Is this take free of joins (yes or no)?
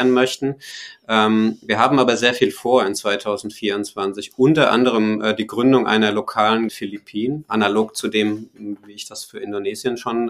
no